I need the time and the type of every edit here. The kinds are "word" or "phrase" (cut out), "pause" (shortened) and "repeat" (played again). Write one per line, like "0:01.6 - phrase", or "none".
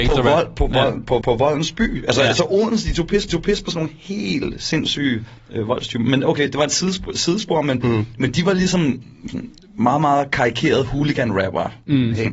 0:01.2 - repeat
0:03.3 - repeat